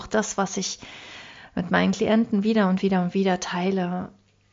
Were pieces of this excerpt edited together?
no; 0 cuts

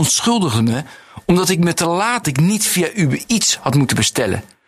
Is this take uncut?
no; 1 cut; at 2.2 s

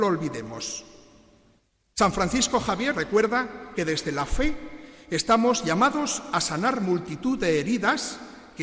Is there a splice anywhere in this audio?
yes; 1 cut; at 2.9 s

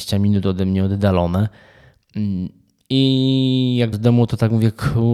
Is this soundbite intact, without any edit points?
no; 1 cut; at 3.9 s

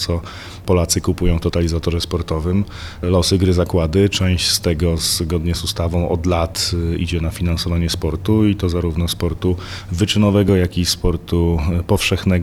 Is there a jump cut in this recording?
no; 0 cuts

